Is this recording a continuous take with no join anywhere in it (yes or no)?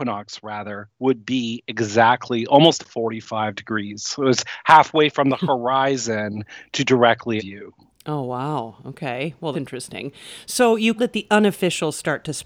no